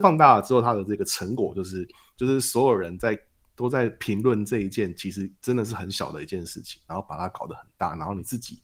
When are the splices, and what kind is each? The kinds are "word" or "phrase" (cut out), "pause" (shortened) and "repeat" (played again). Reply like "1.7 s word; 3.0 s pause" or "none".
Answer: none